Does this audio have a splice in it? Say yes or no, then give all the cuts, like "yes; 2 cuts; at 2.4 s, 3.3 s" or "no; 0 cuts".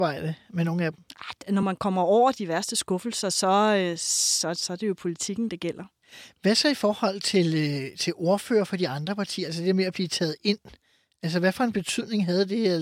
no; 0 cuts